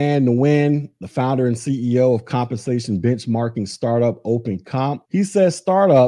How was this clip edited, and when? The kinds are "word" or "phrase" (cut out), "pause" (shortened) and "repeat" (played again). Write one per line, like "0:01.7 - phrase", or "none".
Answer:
none